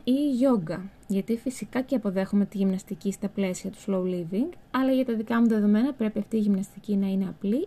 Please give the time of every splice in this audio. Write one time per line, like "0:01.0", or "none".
none